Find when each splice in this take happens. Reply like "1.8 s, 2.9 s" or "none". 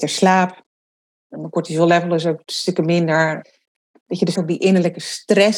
4.4 s